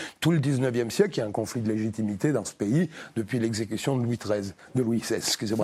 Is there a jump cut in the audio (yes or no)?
no